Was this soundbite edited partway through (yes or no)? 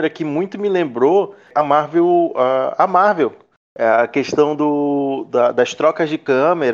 no